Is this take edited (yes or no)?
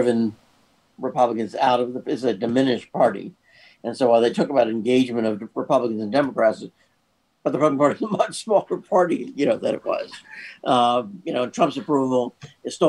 no